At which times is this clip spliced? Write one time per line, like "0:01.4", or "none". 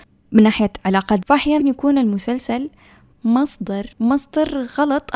0:01.2
0:01.6
0:03.9